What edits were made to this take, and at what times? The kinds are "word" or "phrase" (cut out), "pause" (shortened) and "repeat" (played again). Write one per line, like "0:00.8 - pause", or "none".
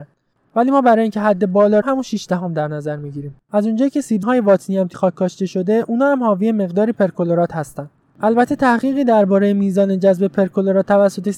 0:01.8 - phrase
0:03.4 - pause
0:04.2 - word
0:04.9 - word